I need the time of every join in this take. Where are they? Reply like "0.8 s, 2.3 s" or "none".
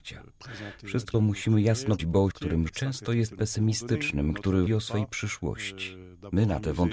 1.1 s, 2.0 s, 2.3 s, 2.7 s, 3.3 s, 4.7 s